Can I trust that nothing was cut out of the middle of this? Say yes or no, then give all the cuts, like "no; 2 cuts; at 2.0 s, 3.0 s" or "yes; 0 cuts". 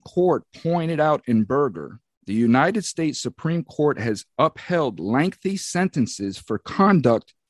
yes; 0 cuts